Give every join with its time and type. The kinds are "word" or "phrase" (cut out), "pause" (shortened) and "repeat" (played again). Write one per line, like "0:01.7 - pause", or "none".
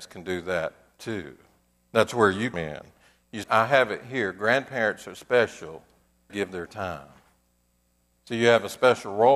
0:02.5 - word
0:03.4 - word
0:06.3 - word